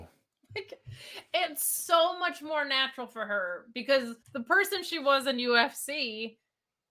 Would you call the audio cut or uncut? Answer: cut